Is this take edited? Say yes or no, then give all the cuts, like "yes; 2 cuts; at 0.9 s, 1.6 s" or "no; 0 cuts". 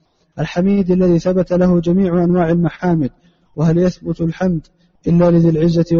no; 0 cuts